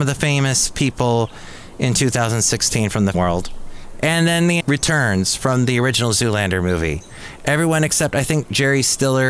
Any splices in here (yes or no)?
yes